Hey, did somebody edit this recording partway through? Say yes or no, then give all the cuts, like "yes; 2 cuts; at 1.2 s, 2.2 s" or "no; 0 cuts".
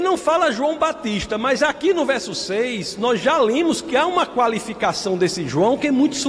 no; 0 cuts